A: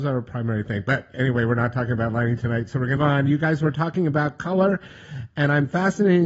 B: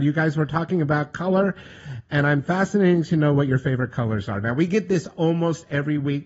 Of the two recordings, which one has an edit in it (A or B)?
A